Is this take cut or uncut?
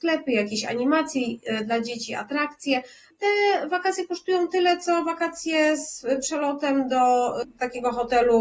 uncut